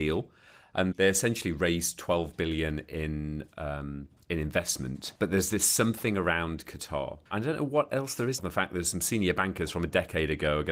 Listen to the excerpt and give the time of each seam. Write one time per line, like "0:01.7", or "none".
0:00.9
0:05.2
0:07.3
0:08.4